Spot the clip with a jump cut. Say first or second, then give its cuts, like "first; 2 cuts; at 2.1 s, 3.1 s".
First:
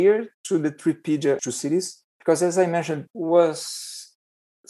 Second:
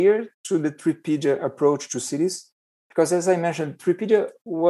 first; 3 cuts; at 1.4 s, 2.1 s, 3.1 s